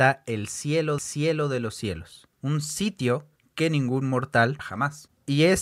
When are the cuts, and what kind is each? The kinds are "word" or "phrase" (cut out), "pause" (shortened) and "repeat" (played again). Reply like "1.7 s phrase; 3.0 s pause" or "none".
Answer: 1.0 s repeat; 2.3 s pause; 3.4 s pause; 4.6 s word